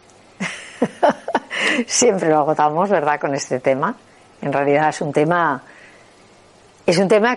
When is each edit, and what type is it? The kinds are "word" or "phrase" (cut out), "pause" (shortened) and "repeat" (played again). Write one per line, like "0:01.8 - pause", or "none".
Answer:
none

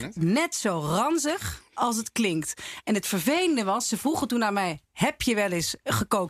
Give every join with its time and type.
none

